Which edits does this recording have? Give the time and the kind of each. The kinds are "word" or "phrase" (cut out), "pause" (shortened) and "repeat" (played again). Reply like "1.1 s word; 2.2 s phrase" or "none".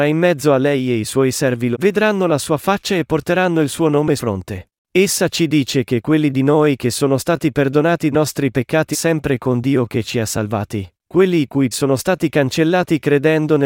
1.7 s word; 4.2 s word; 4.8 s pause; 8.1 s word; 8.9 s phrase; 11.0 s pause; 11.7 s word